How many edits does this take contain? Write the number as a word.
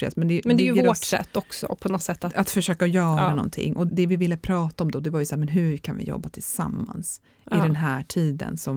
one